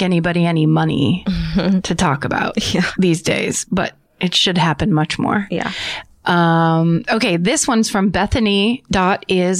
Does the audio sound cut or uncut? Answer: uncut